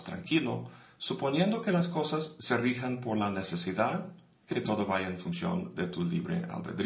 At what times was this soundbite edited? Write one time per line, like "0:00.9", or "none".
0:04.5